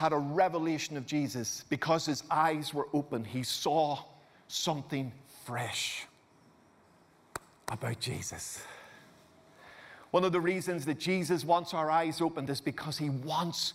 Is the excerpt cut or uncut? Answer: uncut